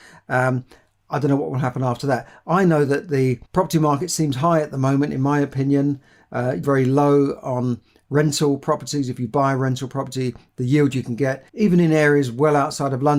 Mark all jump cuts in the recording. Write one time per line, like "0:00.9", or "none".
0:03.5
0:06.6
0:11.5